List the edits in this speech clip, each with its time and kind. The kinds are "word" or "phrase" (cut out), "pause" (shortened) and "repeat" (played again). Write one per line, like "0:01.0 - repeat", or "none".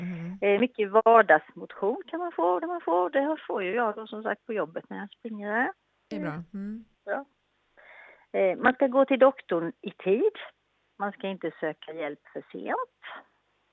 0:02.6 - repeat
0:06.1 - word
0:06.9 - pause